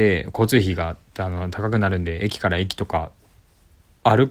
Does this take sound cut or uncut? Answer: uncut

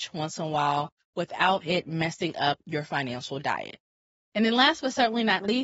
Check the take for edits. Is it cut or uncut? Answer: uncut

